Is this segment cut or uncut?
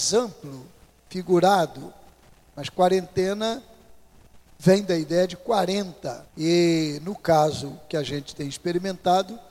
cut